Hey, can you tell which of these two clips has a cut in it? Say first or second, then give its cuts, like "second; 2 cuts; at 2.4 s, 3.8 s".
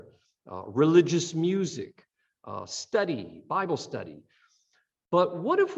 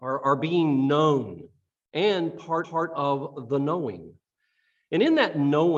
second; 1 cut; at 2.6 s